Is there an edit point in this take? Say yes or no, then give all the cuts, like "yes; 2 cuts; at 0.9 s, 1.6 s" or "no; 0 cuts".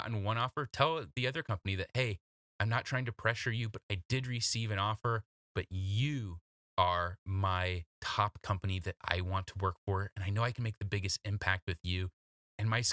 no; 0 cuts